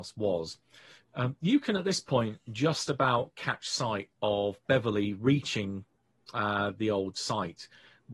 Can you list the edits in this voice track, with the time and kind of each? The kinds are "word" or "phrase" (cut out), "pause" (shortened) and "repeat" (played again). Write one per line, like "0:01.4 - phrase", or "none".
none